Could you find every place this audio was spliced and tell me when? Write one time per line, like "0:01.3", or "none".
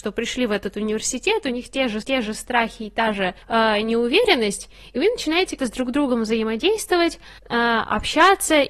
0:02.0
0:03.4
0:05.6
0:07.4